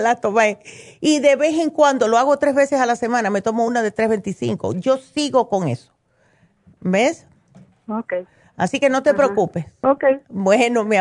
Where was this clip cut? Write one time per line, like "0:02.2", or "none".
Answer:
none